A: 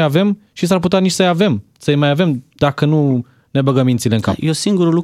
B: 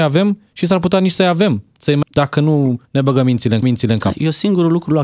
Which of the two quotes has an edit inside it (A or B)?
B